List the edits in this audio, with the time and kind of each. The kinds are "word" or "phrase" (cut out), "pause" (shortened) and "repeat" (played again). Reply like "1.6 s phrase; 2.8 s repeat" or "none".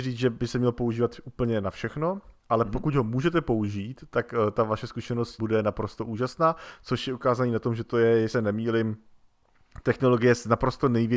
5.4 s word; 8.3 s word